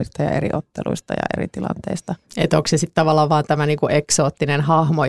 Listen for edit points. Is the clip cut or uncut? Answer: cut